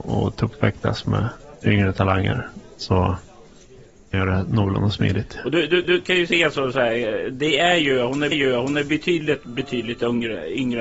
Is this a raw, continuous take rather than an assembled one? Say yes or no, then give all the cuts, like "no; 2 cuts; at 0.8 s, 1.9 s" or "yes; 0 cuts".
no; 3 cuts; at 4.1 s, 5.8 s, 8.3 s